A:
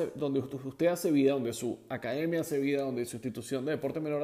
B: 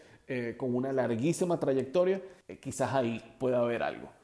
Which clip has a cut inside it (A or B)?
B